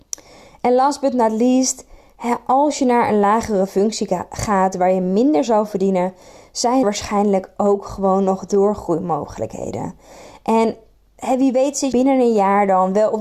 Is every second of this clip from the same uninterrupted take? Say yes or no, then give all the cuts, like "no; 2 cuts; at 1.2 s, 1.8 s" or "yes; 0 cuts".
no; 2 cuts; at 6.8 s, 11.9 s